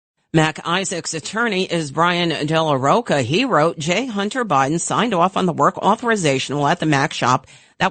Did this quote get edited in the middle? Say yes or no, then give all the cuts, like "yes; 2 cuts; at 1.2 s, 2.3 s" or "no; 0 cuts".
no; 0 cuts